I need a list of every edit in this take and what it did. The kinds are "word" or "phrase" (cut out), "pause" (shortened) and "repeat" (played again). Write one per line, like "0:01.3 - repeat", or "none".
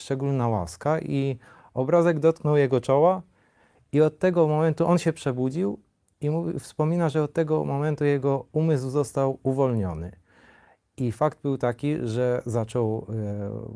none